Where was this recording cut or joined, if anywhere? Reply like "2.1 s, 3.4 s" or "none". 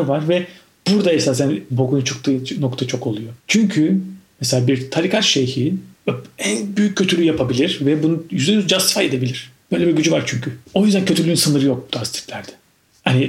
1.7 s, 3.4 s, 10.6 s, 11.9 s